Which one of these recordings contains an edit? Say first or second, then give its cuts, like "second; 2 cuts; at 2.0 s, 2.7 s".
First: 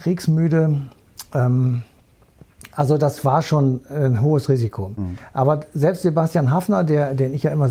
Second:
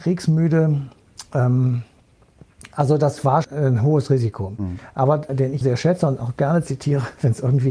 second; 3 cuts; at 3.4 s, 5.3 s, 5.6 s